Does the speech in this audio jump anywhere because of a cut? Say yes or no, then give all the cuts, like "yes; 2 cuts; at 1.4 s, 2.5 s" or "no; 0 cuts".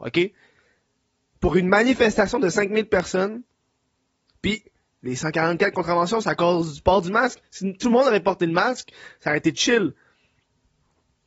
no; 0 cuts